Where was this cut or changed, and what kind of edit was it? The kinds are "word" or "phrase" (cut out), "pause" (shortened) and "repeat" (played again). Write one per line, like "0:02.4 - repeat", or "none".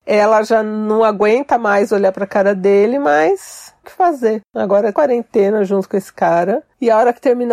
0:03.8 - phrase
0:04.9 - phrase